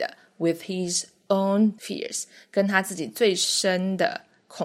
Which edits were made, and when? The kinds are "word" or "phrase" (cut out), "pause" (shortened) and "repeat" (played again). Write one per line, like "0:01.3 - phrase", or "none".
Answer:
0:01.8 - word